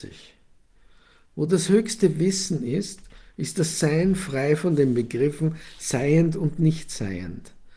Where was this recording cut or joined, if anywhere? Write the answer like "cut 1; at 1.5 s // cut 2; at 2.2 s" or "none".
none